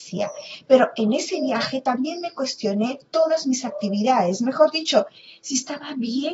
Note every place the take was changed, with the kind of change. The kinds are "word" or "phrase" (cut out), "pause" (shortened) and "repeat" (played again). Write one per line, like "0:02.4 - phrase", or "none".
none